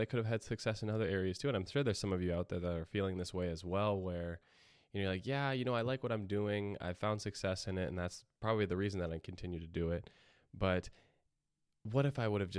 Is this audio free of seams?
yes; 0 cuts

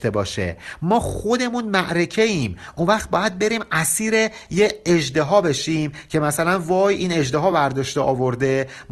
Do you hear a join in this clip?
no; 0 cuts

